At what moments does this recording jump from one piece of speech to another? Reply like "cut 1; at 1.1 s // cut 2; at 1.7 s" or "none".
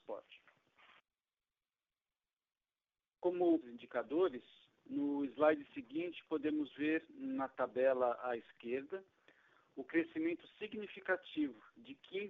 cut 1; at 3.6 s